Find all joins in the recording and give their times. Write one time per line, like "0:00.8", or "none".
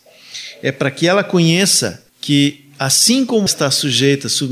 0:02.1
0:03.5

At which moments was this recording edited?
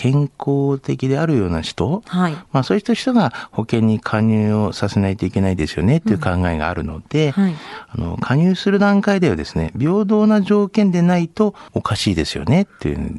0:11.7

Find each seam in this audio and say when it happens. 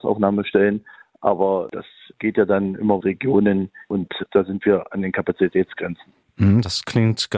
0:03.0

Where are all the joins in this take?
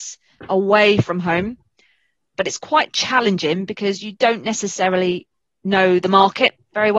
none

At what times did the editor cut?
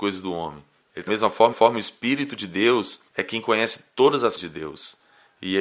0:01.1
0:01.5
0:03.1
0:04.4

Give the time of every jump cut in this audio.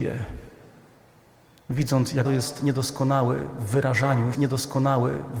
0:02.2
0:04.3

